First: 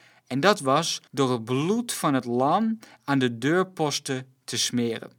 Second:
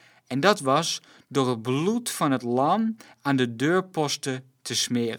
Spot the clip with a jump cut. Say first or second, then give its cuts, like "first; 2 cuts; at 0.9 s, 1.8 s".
first; 1 cut; at 1.1 s